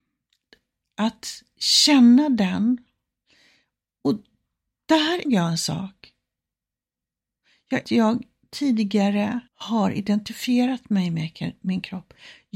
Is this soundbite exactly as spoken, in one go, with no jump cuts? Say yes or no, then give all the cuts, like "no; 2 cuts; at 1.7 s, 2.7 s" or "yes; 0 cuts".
no; 3 cuts; at 5.2 s, 7.8 s, 9.5 s